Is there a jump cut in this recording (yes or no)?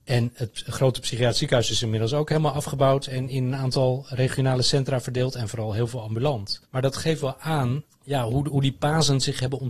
yes